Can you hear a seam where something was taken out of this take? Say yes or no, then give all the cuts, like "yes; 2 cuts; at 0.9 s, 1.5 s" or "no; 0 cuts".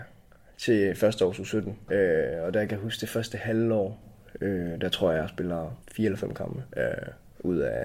yes; 1 cut; at 5.8 s